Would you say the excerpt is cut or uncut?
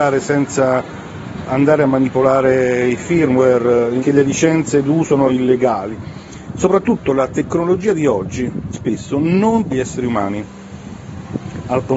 cut